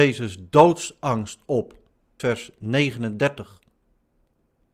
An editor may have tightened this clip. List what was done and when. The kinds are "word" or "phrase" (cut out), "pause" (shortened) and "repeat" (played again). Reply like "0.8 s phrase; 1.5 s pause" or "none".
2.2 s word